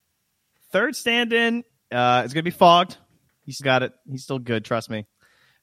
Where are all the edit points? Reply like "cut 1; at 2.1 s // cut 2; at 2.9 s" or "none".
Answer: cut 1; at 3.6 s